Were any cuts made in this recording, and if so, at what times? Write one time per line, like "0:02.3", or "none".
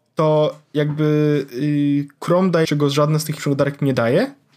0:02.6
0:03.4